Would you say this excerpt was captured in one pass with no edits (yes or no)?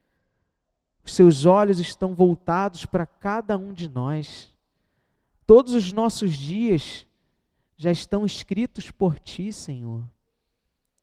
yes